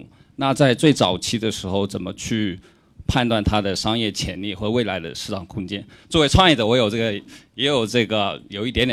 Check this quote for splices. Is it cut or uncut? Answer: uncut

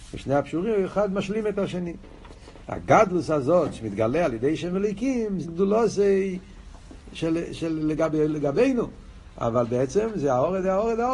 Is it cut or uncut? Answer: cut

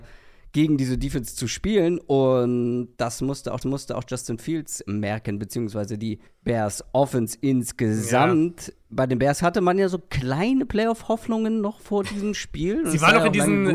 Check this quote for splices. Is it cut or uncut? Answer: cut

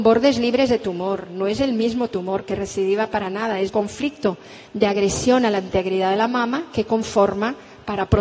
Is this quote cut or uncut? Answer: cut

